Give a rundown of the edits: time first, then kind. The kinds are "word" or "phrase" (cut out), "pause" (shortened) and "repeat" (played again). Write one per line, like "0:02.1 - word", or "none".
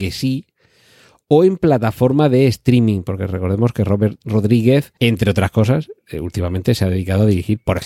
0:05.0 - pause